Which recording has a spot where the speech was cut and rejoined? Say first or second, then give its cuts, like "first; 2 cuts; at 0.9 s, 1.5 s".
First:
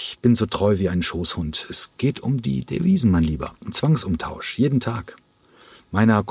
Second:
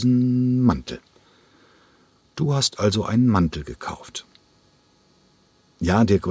first; 1 cut; at 3.6 s